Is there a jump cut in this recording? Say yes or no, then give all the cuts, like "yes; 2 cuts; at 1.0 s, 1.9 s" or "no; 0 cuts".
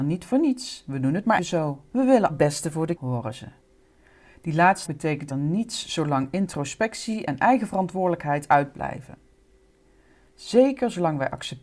yes; 5 cuts; at 1.4 s, 2.3 s, 3.0 s, 4.9 s, 5.3 s